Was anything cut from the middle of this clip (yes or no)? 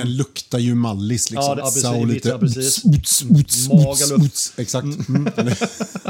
yes